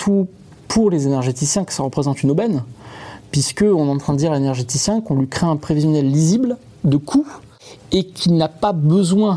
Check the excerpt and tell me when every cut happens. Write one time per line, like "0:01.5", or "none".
none